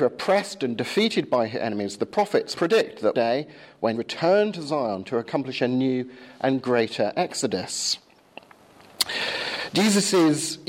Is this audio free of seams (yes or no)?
no